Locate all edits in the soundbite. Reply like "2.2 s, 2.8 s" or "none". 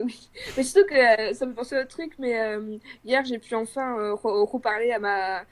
none